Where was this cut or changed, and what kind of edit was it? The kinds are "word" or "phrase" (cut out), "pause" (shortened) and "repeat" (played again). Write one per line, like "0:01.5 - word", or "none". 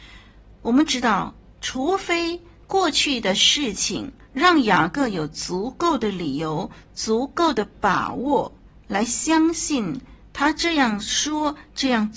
none